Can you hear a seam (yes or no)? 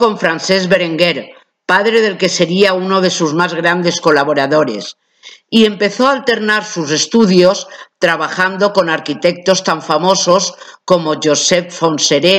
no